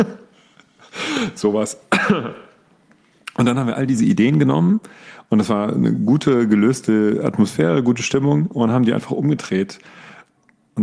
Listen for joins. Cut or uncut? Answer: uncut